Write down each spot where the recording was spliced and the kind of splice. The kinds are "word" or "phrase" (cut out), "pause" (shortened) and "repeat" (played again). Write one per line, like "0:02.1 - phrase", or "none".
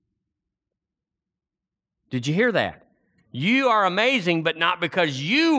none